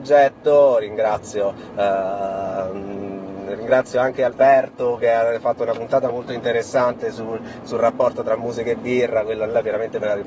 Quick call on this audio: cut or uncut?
uncut